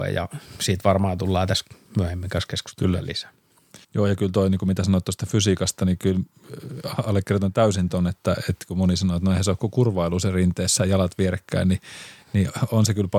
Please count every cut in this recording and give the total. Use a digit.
1